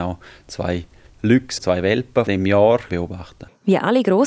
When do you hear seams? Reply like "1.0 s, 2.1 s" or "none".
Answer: 1.1 s, 1.6 s, 2.3 s, 2.9 s